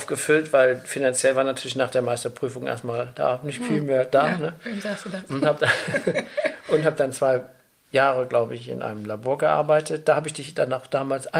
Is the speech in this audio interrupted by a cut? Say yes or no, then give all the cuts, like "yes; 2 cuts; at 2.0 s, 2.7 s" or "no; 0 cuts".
no; 0 cuts